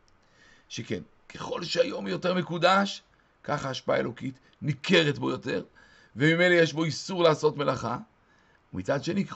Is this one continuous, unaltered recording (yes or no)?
yes